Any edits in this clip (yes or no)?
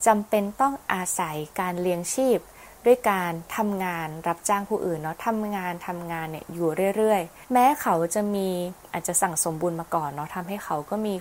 yes